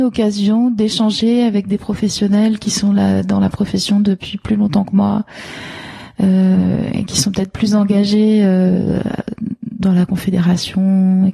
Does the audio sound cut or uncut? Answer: uncut